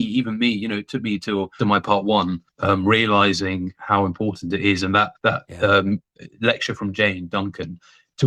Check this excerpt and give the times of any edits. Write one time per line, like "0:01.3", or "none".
0:01.6
0:02.5
0:05.2